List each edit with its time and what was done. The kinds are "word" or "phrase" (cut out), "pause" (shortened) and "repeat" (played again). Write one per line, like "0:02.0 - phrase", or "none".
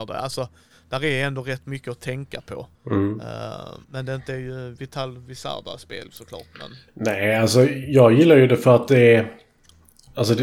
0:02.7 - pause
0:03.8 - pause
0:06.9 - pause

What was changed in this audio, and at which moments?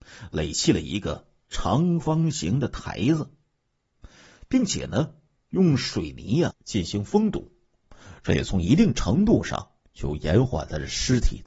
0:06.5 - word

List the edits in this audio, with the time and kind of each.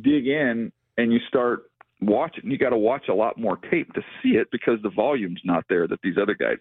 0:04.5 - word

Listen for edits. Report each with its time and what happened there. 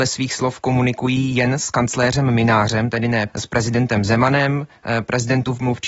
0:03.3 - word

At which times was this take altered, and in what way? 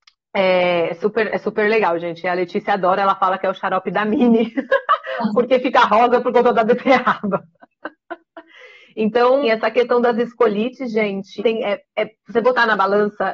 0:09.4 - word
0:11.4 - word

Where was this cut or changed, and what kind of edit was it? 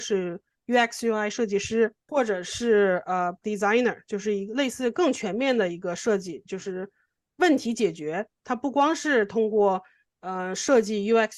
0:02.1 - word
0:03.4 - word

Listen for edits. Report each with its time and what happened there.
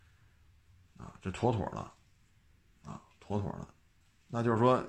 none

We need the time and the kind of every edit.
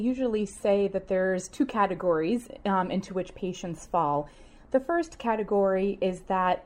none

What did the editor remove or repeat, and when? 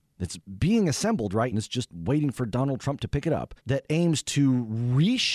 0:01.5 - word
0:03.6 - pause

